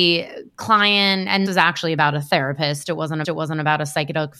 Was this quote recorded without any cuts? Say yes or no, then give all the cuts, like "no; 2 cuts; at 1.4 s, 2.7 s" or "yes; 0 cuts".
no; 2 cuts; at 1.5 s, 3.2 s